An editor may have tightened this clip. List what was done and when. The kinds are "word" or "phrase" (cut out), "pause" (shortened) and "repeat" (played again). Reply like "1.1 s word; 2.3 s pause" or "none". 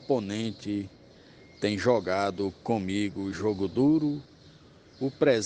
none

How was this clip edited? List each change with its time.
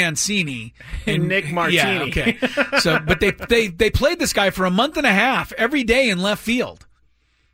none

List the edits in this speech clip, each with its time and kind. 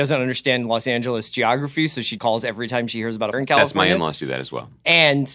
2.2 s word; 3.3 s word

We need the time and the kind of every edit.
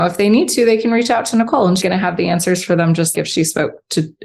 1.8 s word; 3.1 s word

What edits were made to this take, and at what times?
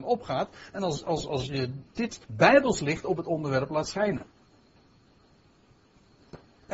2.2 s pause

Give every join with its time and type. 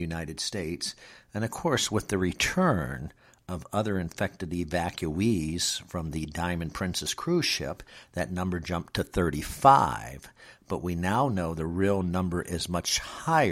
none

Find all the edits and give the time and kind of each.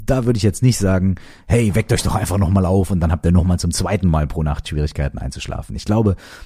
none

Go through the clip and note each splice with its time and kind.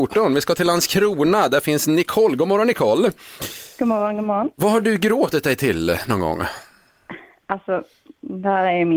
none

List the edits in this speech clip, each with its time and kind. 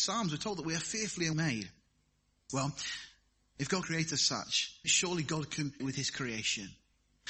1.3 s word; 3.8 s word; 4.8 s word; 5.8 s word

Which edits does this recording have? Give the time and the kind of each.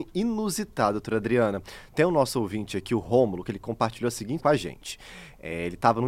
4.4 s word

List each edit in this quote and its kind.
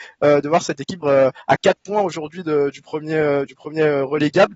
1.0 s word

